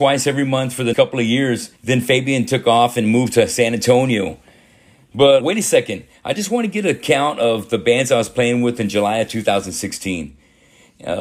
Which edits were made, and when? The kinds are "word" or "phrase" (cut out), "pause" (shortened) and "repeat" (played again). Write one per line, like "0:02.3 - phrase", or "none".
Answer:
0:00.9 - word
0:01.8 - pause
0:05.4 - word